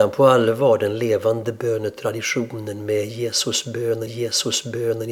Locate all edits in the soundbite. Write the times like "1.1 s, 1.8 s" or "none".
4.1 s